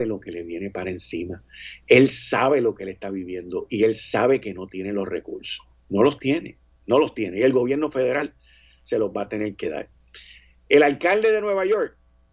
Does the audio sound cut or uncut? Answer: uncut